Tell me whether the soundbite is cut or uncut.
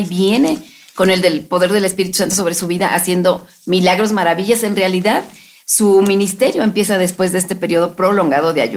uncut